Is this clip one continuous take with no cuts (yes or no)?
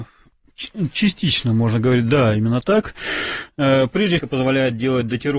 no